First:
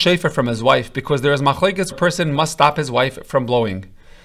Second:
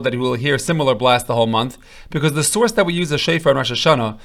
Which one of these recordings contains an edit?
first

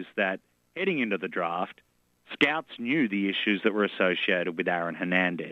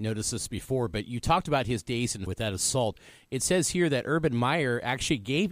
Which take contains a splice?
second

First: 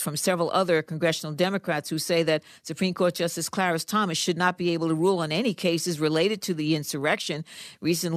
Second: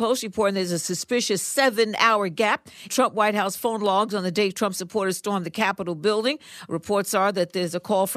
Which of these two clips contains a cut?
second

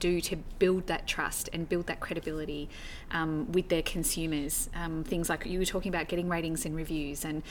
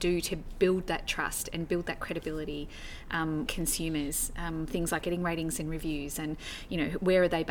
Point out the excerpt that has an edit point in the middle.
second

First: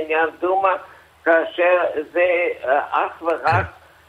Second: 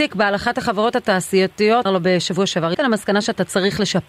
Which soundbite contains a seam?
second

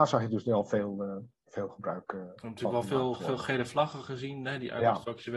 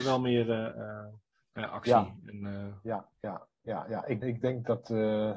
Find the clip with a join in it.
second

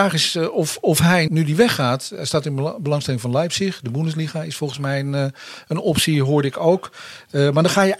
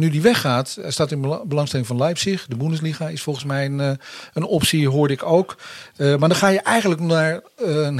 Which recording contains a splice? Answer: first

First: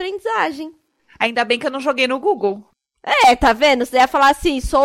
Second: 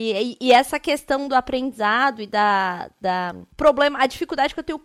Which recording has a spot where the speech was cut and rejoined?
second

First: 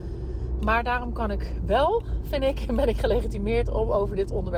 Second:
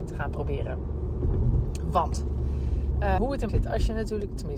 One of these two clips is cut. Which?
second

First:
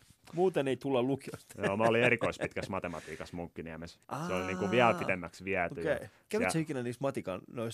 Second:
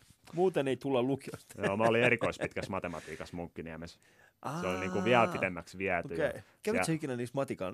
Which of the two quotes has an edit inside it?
first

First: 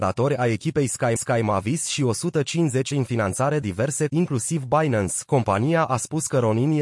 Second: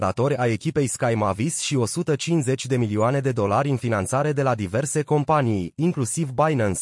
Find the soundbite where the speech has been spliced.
first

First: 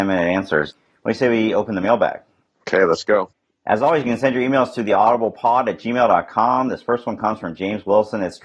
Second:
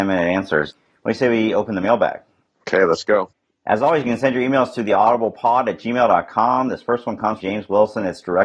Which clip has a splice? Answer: second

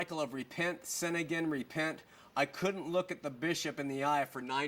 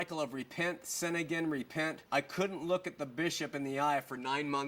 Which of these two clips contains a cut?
second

